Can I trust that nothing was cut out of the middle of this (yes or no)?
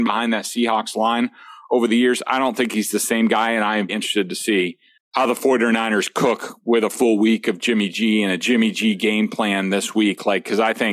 no